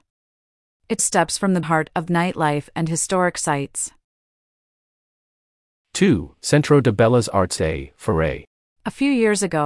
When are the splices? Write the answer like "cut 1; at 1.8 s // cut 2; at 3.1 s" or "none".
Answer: cut 1; at 1.0 s // cut 2; at 1.6 s // cut 3; at 2.1 s // cut 4; at 7.6 s